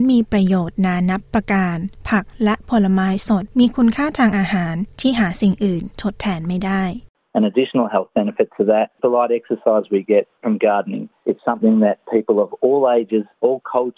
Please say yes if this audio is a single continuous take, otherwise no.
no